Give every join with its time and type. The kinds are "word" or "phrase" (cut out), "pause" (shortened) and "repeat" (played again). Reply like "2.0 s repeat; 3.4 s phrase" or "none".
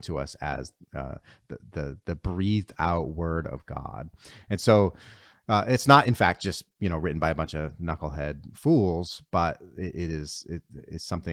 none